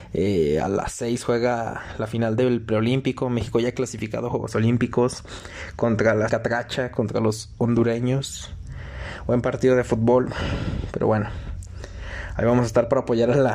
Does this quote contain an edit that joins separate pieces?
yes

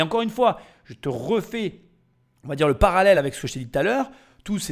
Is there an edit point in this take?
no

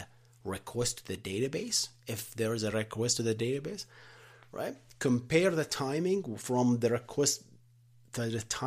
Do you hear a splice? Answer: no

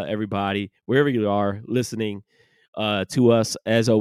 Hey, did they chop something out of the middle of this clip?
no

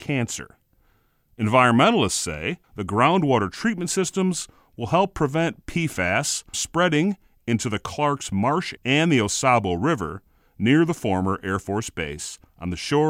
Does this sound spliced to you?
yes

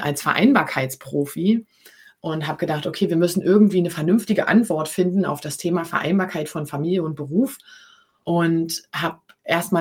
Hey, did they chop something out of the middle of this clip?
no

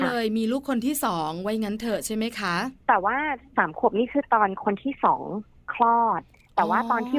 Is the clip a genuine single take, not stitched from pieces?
no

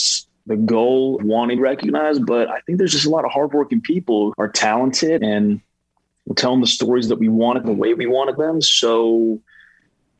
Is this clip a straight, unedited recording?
no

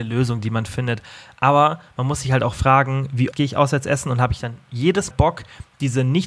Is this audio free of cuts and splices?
no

